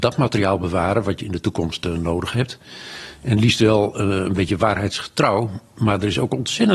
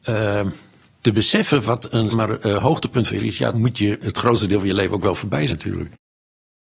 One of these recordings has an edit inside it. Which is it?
second; 4 cuts; at 2.1 s, 3.2 s, 3.5 s, 5.5 s

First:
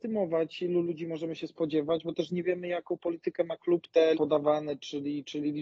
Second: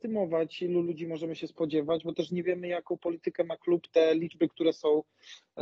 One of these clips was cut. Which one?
first; 1 cut; at 4.1 s

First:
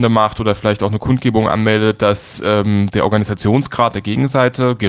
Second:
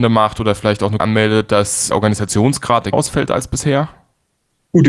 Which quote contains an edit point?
second; 3 cuts; at 1.0 s, 1.9 s, 2.9 s

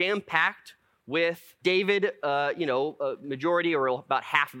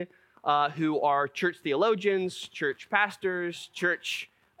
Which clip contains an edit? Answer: first; 1 cut; at 1.6 s

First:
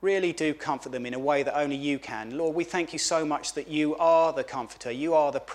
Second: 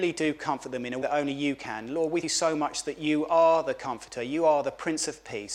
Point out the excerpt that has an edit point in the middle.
second; 2 cuts; at 1.0 s, 2.2 s

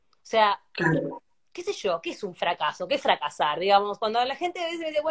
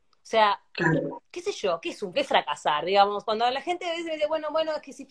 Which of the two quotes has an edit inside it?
second; 2 cuts; at 1.2 s, 2.1 s

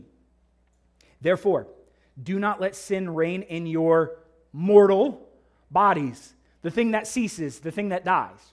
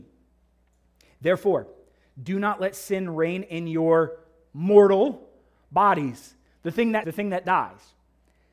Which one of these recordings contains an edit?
second; 1 cut; at 7.0 s

